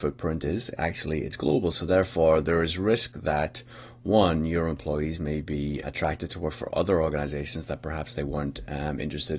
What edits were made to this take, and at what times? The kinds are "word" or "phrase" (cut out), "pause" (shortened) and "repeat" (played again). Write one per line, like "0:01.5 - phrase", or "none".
0:05.8 - word
0:06.7 - word